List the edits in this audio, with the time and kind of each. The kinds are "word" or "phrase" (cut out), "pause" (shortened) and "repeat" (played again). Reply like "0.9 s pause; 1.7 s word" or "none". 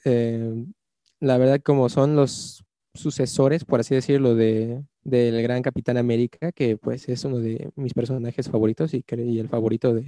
none